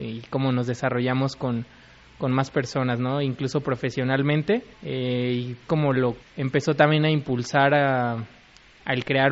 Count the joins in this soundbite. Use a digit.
3